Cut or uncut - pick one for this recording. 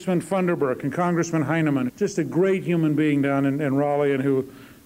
cut